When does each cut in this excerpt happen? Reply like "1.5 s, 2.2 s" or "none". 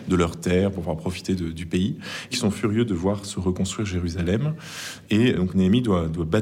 2.3 s, 5.3 s